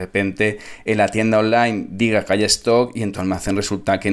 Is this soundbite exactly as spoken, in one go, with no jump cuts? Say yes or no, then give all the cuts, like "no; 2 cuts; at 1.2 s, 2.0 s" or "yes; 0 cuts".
yes; 0 cuts